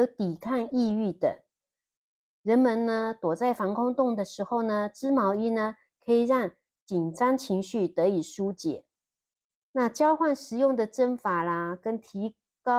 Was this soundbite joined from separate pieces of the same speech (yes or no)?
no